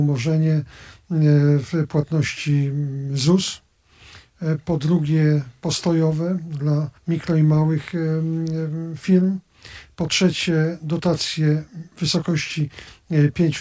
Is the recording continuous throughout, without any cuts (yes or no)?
no